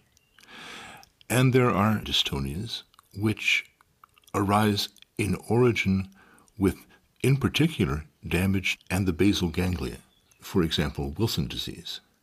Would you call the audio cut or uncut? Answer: cut